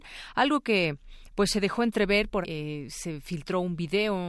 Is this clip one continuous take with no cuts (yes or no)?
no